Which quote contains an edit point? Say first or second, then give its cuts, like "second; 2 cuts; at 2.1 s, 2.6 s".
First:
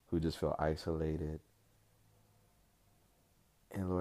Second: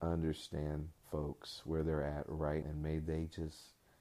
second; 2 cuts; at 1.0 s, 2.6 s